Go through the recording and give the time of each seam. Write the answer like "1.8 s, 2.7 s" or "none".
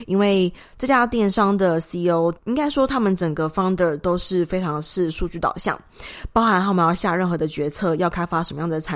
2.4 s

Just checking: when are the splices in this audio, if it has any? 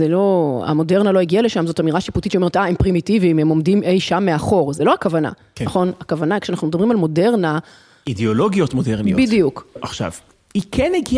none

